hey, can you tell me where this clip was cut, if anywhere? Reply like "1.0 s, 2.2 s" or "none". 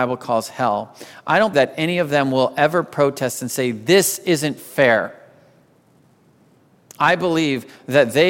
1.5 s